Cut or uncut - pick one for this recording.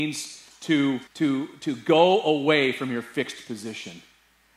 cut